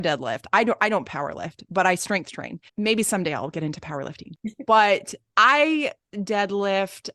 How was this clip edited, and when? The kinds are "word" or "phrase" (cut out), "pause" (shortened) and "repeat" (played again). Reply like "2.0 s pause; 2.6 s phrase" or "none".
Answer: 2.7 s pause